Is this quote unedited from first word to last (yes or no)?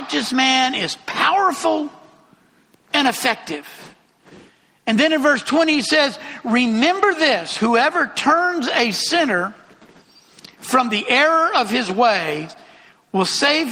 yes